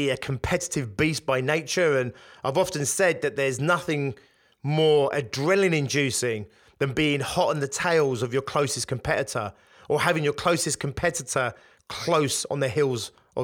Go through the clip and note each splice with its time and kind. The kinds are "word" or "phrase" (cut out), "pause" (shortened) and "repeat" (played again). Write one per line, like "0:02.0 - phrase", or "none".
none